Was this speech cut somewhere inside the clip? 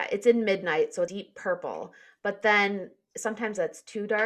no; 0 cuts

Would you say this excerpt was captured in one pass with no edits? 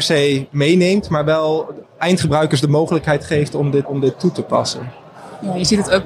no; 2 cuts; at 1.8 s, 3.8 s

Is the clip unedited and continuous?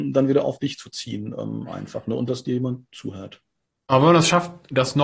yes; 0 cuts

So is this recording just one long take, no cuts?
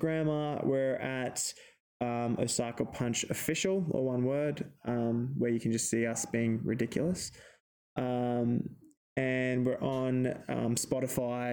yes; 0 cuts

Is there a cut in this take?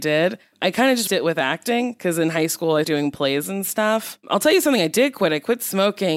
yes; 2 cuts; at 1.1 s, 2.8 s

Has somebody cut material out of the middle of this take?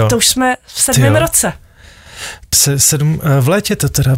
yes; 1 cut; at 2.5 s

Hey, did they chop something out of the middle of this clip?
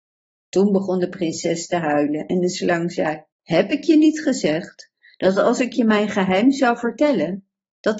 yes; 1 cut; at 3.3 s

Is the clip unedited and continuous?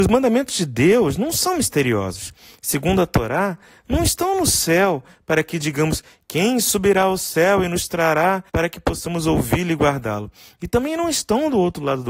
no; 1 cut; at 8.5 s

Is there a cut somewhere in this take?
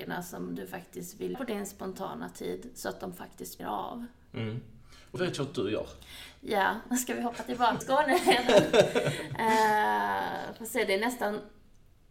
yes; 4 cuts; at 1.3 s, 3.6 s, 5.2 s, 7.8 s

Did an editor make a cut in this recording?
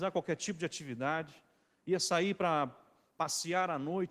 no; 0 cuts

